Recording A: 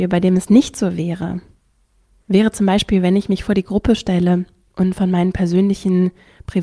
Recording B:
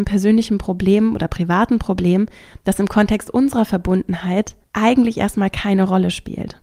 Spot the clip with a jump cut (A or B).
B